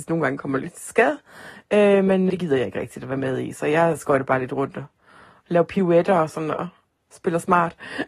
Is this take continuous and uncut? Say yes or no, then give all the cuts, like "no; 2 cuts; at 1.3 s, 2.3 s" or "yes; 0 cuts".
no; 1 cut; at 2.3 s